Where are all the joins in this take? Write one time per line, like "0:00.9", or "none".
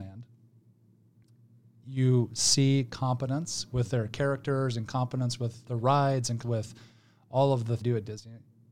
0:05.7
0:06.4
0:07.8